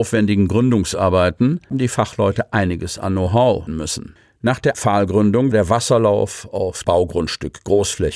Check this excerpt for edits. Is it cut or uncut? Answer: cut